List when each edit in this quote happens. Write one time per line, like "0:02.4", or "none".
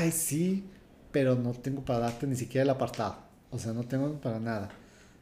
none